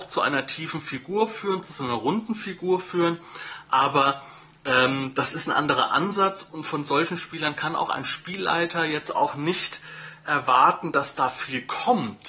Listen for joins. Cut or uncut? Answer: uncut